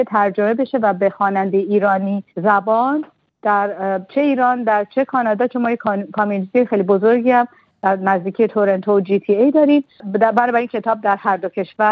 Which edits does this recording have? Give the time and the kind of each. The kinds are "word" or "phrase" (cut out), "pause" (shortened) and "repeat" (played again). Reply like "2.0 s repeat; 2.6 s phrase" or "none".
2.3 s pause